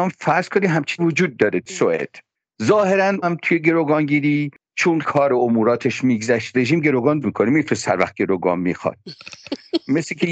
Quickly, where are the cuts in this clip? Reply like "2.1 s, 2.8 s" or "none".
1.0 s, 1.7 s, 3.2 s, 5.0 s, 6.5 s, 7.2 s, 7.8 s